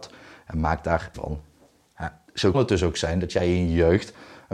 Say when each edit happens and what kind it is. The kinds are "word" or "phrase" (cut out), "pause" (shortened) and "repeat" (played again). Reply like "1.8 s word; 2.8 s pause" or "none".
1.1 s word; 2.5 s word